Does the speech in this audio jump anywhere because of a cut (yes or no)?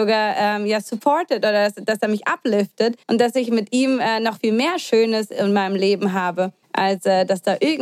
yes